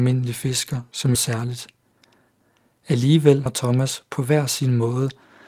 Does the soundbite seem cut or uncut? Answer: cut